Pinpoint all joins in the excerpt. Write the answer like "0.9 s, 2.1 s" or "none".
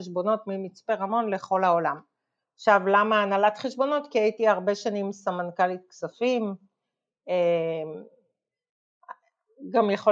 none